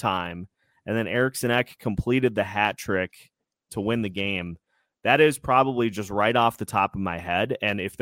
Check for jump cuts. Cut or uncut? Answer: cut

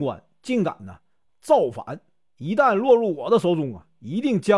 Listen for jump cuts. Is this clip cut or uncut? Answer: cut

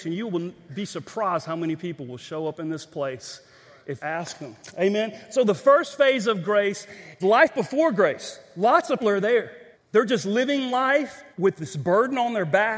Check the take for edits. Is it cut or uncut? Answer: cut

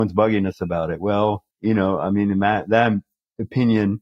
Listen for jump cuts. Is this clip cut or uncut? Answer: cut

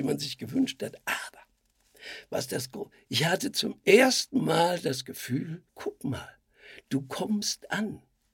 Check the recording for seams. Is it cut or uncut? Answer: cut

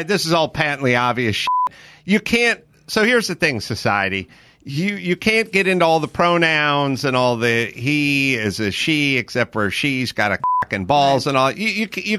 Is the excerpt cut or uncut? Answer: uncut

